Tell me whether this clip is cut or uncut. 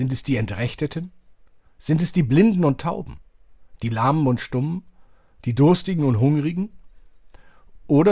uncut